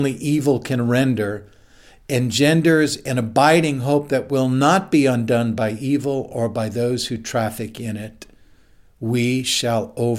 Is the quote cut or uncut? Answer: uncut